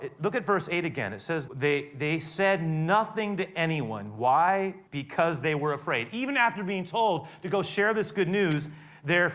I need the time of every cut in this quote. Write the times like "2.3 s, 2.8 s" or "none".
1.5 s, 4.9 s